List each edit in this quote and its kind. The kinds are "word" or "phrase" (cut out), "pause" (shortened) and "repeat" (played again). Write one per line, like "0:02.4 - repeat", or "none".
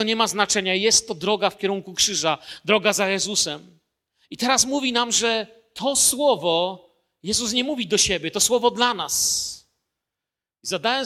none